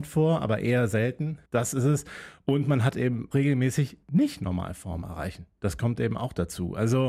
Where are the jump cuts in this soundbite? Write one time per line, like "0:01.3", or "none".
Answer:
0:01.5
0:03.3
0:04.0